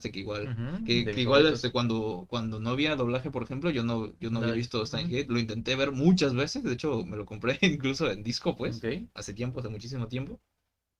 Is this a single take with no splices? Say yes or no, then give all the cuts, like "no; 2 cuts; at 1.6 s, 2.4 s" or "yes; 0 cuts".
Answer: yes; 0 cuts